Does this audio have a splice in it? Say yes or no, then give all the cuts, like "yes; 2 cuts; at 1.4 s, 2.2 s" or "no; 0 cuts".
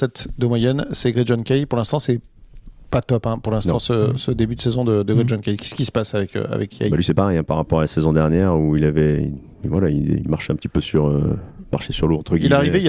no; 0 cuts